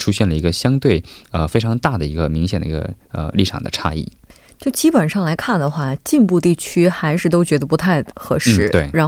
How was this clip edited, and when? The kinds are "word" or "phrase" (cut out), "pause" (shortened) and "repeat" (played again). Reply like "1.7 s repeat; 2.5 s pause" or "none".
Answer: none